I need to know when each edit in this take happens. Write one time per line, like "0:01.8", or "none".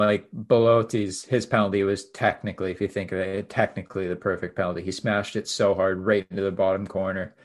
none